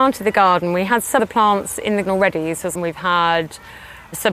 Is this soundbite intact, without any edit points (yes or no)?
no